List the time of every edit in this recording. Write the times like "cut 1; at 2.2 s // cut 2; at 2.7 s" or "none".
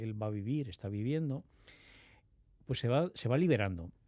none